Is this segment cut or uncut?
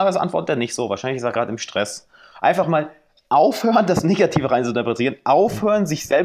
uncut